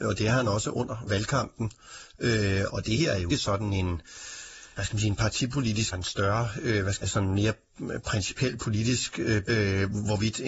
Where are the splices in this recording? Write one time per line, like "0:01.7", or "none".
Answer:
0:01.1
0:02.7
0:03.3
0:04.8
0:05.9
0:07.0
0:09.4